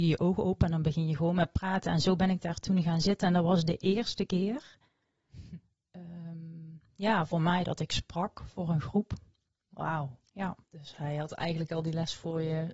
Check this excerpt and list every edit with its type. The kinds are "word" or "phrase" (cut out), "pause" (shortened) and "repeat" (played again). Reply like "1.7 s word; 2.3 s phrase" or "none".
10.6 s pause